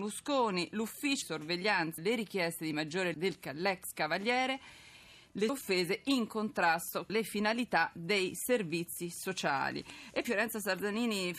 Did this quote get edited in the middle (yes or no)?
yes